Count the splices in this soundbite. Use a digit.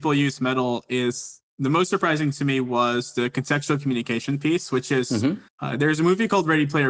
1